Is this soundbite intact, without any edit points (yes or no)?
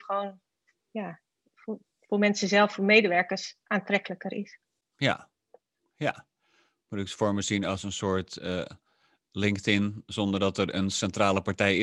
yes